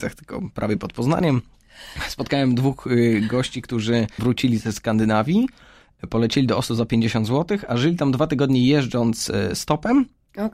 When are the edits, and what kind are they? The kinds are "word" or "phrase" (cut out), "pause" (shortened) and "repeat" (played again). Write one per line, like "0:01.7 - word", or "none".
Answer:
0:04.2 - word